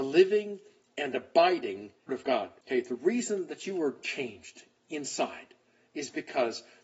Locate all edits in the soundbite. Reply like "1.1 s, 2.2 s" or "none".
2.1 s, 2.6 s